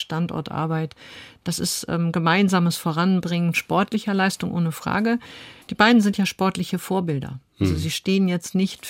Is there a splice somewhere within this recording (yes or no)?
yes